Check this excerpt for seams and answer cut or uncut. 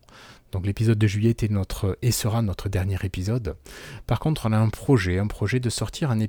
uncut